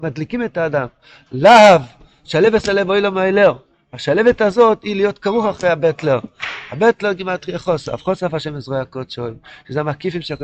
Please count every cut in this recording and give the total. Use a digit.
0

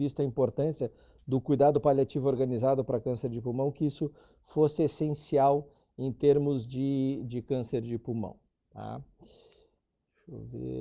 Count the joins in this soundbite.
0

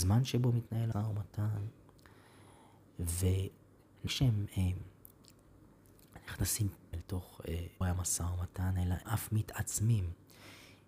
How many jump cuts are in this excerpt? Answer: 5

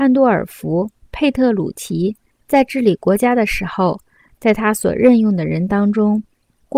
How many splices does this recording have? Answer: 0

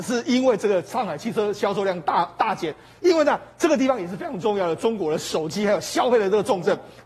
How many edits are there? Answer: 0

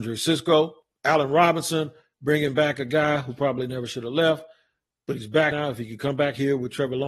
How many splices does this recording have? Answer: 0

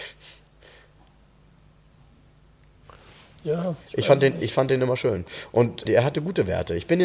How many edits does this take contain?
2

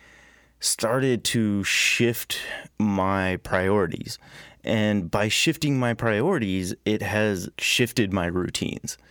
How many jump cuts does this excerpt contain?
2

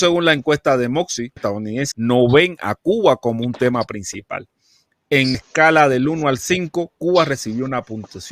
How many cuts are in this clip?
3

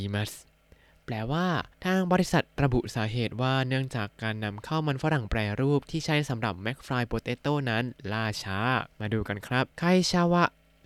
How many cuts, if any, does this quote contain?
3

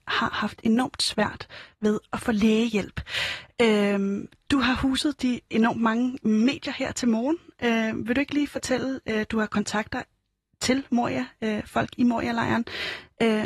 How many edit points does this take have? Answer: 0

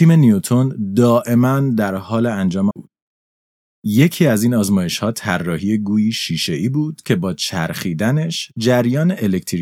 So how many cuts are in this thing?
1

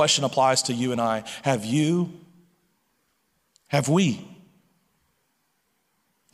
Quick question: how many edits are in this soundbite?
0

